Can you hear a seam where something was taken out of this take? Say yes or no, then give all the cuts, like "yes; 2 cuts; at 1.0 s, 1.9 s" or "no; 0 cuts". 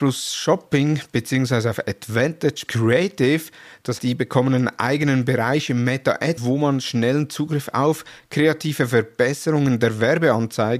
yes; 3 cuts; at 2.7 s, 4.0 s, 6.4 s